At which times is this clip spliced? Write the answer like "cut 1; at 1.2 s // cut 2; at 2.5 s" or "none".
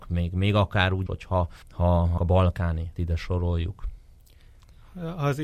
cut 1; at 1.1 s // cut 2; at 1.6 s // cut 3; at 2.2 s // cut 4; at 3.0 s

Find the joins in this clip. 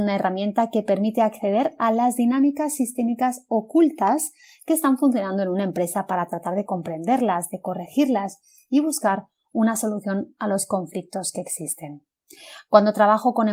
none

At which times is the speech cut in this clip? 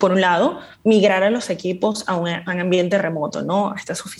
none

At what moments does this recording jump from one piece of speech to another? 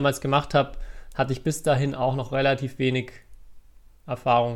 none

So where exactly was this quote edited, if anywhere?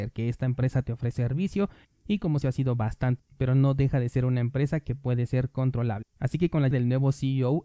cut 1; at 1.1 s // cut 2; at 2.4 s // cut 3; at 3.2 s // cut 4; at 6.1 s // cut 5; at 6.7 s

